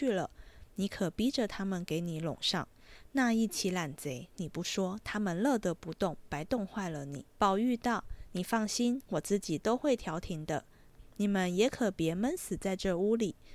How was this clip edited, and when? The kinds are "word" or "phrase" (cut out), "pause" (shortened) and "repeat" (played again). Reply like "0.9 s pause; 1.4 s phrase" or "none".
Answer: 7.3 s pause